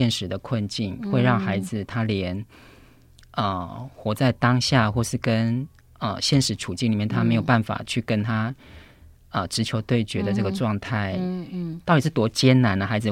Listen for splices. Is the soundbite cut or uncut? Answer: uncut